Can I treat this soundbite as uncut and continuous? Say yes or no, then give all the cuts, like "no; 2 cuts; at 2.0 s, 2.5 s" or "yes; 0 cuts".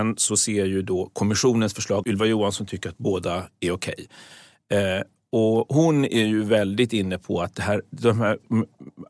no; 1 cut; at 2.0 s